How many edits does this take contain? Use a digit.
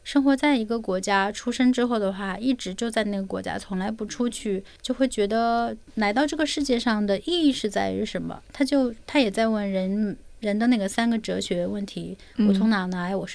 1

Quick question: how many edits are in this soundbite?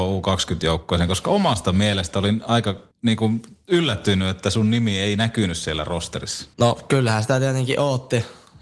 2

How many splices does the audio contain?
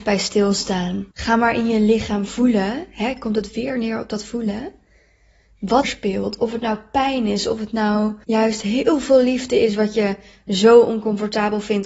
3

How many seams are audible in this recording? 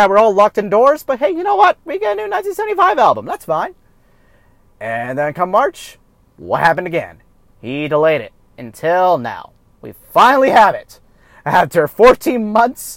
0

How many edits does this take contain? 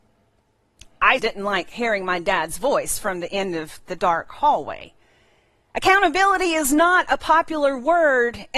1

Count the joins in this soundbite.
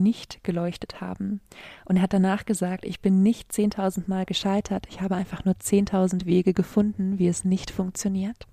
0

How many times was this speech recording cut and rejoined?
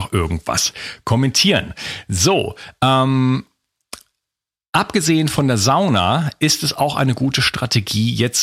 0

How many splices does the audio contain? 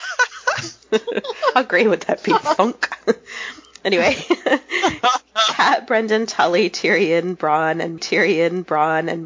1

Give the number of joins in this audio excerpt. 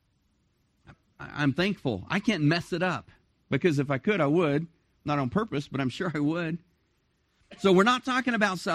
0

